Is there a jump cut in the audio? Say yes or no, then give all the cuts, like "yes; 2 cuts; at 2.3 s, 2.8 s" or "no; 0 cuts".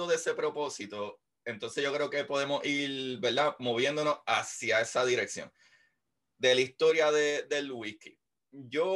no; 0 cuts